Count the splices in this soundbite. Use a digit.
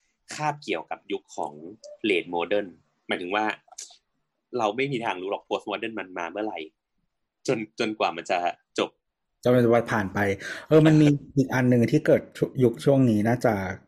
0